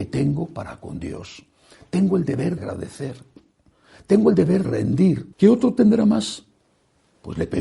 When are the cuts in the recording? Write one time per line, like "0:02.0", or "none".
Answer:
0:02.6
0:04.6
0:05.3

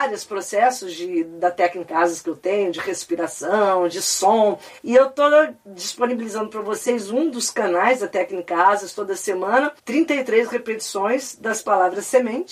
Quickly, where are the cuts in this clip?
0:04.8
0:09.8

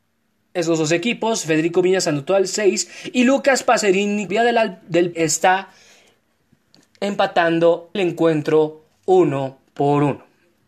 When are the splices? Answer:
0:04.3
0:05.1
0:08.0

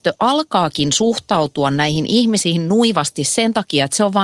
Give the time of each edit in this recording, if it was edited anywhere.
none

